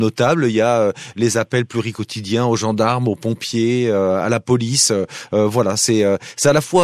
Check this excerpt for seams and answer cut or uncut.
uncut